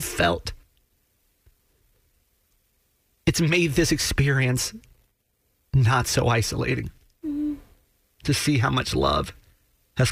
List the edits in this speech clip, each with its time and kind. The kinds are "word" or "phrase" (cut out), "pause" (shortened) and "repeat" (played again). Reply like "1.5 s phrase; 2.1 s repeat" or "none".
none